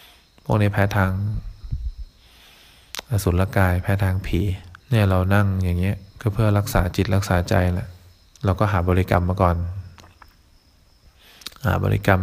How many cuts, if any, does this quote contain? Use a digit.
3